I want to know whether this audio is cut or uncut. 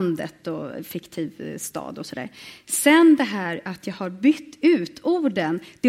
uncut